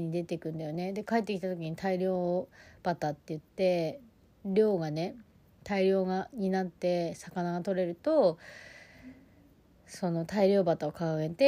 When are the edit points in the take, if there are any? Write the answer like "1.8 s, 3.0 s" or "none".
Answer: none

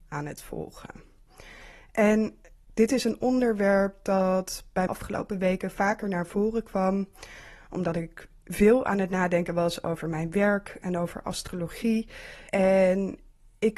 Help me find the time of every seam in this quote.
4.9 s, 12.5 s

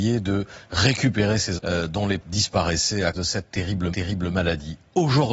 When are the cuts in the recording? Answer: 1.6 s, 2.2 s, 3.1 s, 3.9 s

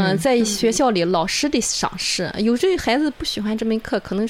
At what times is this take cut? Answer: none

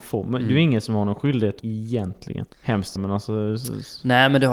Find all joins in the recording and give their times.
1.6 s, 2.5 s, 3.0 s

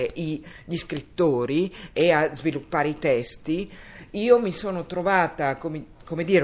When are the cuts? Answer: none

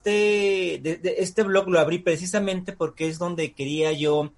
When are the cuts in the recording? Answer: none

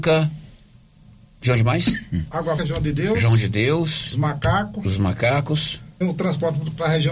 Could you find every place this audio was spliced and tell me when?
2.6 s, 6.0 s

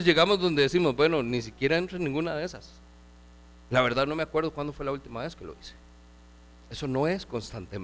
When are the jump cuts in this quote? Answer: none

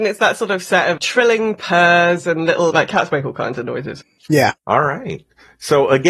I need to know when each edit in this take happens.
1.0 s, 2.7 s, 4.6 s

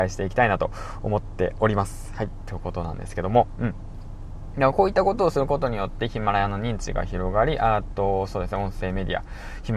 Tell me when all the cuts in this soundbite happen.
none

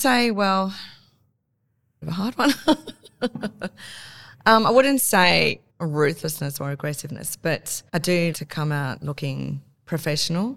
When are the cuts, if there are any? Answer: 2.0 s, 5.7 s, 7.9 s, 8.3 s

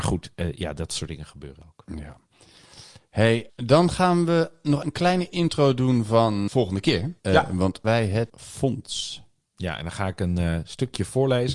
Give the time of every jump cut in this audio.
4.8 s, 6.5 s, 7.2 s, 7.8 s, 8.3 s

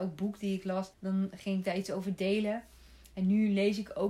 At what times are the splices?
0.9 s

